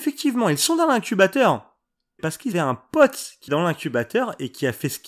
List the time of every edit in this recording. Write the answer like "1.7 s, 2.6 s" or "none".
2.2 s, 2.5 s, 3.5 s